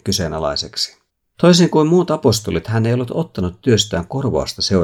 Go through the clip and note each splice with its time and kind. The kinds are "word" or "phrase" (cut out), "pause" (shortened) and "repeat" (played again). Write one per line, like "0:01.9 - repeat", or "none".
0:01.1 - pause